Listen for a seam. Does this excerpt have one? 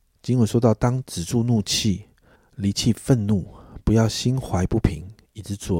yes; 1 cut; at 2.3 s

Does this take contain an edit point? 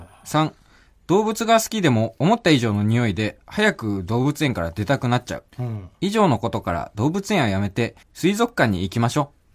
yes; 2 cuts; at 5.5 s, 8.0 s

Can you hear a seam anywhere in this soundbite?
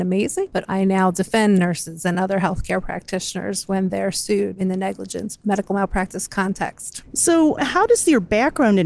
no; 0 cuts

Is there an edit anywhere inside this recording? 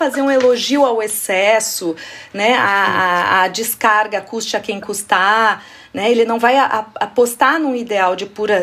no; 0 cuts

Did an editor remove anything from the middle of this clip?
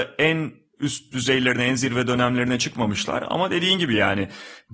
no; 0 cuts

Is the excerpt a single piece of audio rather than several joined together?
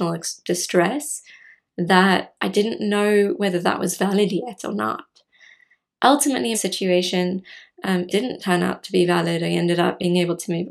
no; 2 cuts; at 6.5 s, 8.1 s

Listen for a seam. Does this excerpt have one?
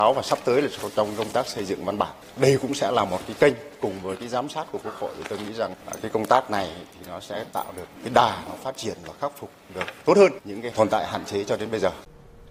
no; 0 cuts

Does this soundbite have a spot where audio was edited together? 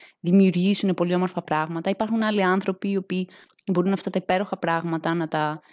no; 0 cuts

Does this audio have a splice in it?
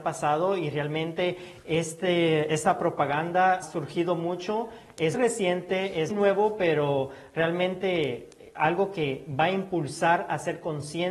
yes; 3 cuts; at 3.6 s, 5.1 s, 6.1 s

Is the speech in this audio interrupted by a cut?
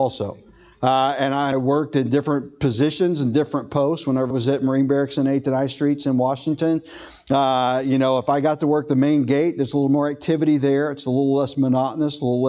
yes; 2 cuts; at 1.5 s, 4.3 s

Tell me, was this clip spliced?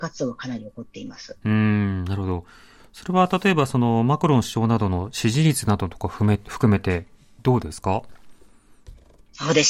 no; 0 cuts

